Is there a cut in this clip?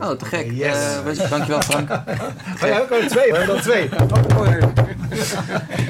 yes; 2 cuts; at 1.2 s, 3.3 s

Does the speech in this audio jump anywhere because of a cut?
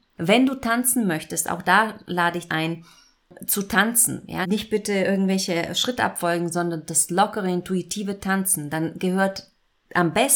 yes; 2 cuts; at 2.5 s, 4.4 s

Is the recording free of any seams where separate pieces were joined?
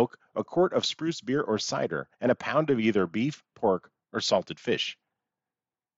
no; 1 cut; at 2.1 s

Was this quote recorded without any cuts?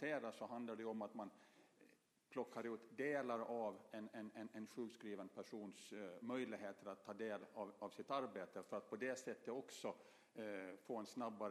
yes; 0 cuts

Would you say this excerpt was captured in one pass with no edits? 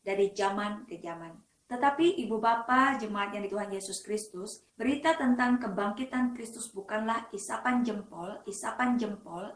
no; 3 cuts; at 3.5 s, 4.7 s, 8.4 s

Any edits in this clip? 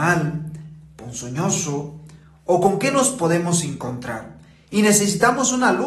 no; 0 cuts

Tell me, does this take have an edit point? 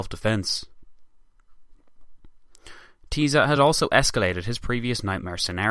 no; 0 cuts

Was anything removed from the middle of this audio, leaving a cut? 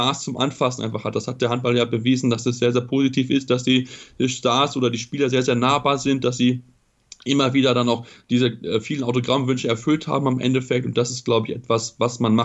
no; 0 cuts

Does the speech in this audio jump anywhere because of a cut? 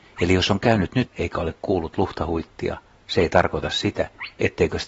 yes; 1 cut; at 1.1 s

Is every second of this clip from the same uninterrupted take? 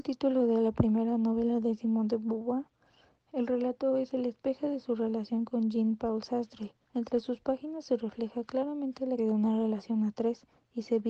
no; 2 cuts; at 6.8 s, 9.2 s

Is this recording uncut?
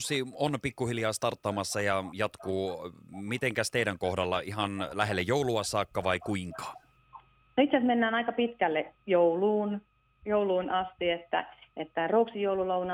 yes; 0 cuts

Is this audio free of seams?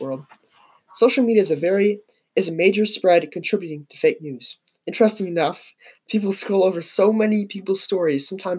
yes; 0 cuts

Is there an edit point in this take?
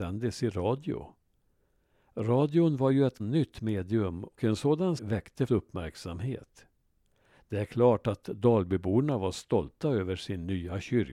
yes; 4 cuts; at 3.2 s, 4.4 s, 5.0 s, 5.5 s

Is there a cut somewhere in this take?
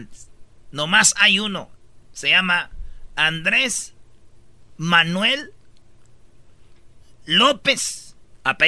no; 0 cuts

